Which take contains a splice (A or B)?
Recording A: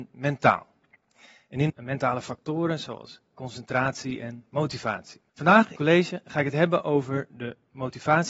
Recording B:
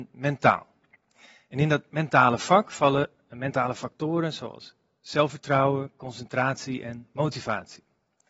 A